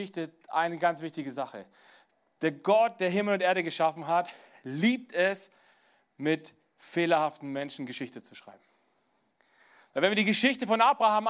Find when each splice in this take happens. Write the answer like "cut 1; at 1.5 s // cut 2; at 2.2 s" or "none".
none